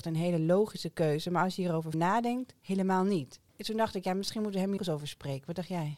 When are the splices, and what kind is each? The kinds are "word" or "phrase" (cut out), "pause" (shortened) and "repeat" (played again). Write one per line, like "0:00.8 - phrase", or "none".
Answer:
0:01.9 - word
0:03.5 - pause
0:04.8 - phrase